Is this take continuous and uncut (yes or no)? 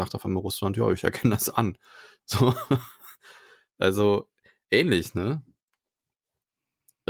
yes